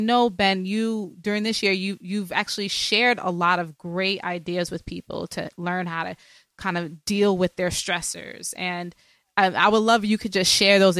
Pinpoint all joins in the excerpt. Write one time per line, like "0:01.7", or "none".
none